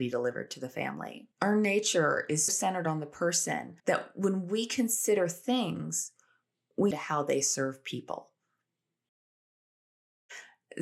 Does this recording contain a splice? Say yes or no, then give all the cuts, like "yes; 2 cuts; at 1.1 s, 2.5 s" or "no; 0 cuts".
yes; 4 cuts; at 1.3 s, 2.5 s, 3.8 s, 6.9 s